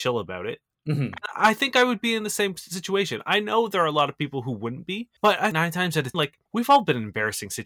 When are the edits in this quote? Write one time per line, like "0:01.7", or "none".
0:05.2
0:05.5
0:06.1
0:06.5